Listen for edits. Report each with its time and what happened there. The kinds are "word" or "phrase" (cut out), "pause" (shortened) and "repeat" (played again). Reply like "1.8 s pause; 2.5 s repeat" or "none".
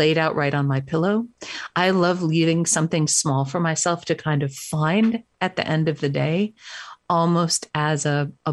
none